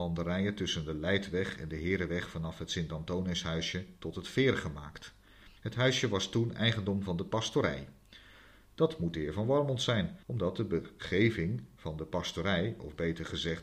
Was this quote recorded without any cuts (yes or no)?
no